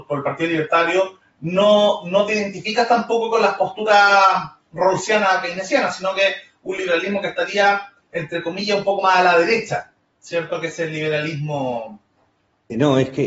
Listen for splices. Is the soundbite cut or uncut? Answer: uncut